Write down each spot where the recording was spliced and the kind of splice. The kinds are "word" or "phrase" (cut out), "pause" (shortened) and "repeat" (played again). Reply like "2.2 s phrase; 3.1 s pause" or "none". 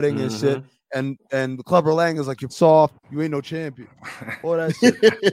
2.5 s word; 3.0 s pause